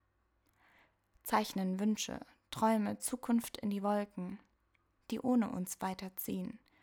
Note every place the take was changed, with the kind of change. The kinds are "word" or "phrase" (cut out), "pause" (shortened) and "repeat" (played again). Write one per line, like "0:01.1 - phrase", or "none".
none